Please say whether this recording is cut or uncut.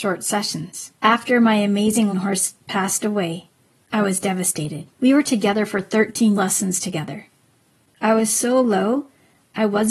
cut